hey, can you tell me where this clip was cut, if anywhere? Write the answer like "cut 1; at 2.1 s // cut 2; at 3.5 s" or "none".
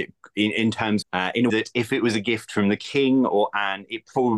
cut 1; at 1.0 s // cut 2; at 1.5 s